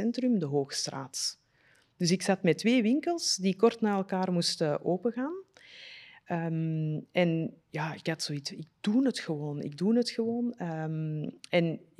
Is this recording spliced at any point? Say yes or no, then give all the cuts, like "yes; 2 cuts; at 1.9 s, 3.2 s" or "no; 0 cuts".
no; 0 cuts